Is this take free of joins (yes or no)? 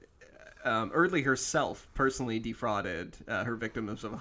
yes